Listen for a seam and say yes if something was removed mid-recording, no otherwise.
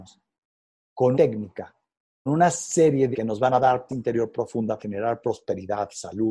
yes